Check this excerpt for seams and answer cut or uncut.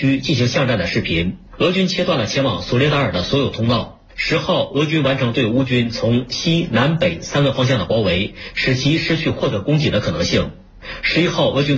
cut